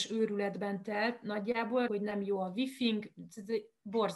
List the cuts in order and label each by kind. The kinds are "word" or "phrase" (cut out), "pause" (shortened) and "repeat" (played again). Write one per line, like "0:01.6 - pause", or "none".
0:01.9 - word